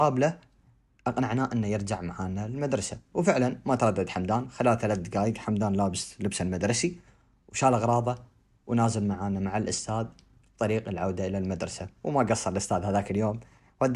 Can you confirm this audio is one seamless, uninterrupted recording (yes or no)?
yes